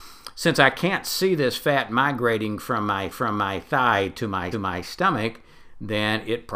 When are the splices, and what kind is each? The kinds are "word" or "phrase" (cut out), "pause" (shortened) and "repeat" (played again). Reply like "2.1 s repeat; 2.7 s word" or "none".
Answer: 3.1 s repeat; 4.5 s repeat